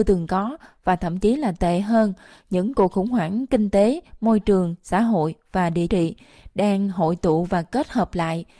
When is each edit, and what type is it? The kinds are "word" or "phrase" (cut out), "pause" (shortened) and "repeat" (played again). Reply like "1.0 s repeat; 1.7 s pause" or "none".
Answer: 5.9 s word

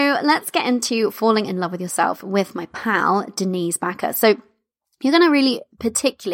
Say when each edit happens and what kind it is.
none

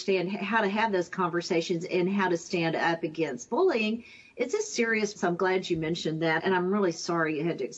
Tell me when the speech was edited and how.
5.2 s word; 6.4 s word

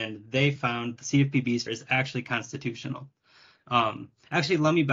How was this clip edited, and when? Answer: 1.0 s phrase; 1.7 s phrase

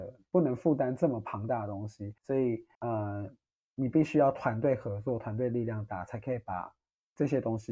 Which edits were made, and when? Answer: 2.2 s pause; 2.7 s pause

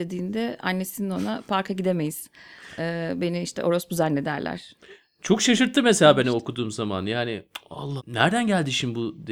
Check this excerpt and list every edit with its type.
8.0 s word

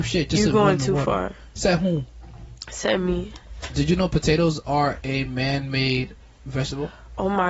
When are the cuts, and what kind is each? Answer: none

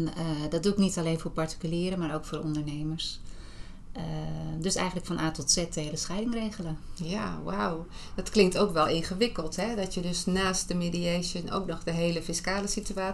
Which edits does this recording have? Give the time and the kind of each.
none

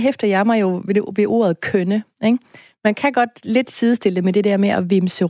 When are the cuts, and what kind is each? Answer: none

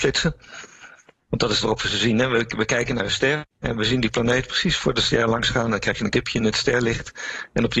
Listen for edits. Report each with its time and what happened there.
1.6 s word; 3.5 s pause; 6.1 s word

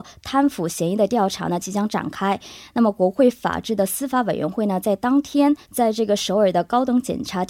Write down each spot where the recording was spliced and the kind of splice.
5.6 s pause

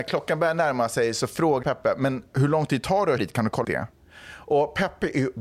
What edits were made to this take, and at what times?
1.6 s word; 3.2 s word; 3.6 s word

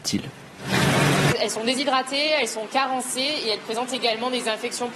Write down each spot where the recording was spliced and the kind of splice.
none

